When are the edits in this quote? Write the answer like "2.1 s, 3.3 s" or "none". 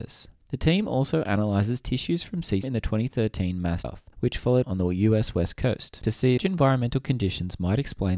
2.6 s, 3.8 s, 4.6 s, 6.4 s